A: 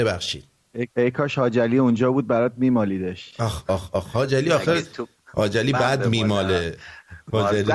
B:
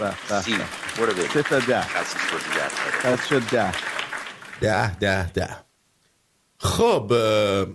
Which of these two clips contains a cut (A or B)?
A